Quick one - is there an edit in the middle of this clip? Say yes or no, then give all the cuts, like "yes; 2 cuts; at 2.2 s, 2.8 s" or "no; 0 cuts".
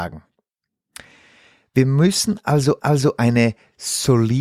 yes; 1 cut; at 2.8 s